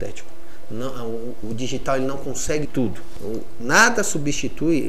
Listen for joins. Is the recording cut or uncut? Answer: cut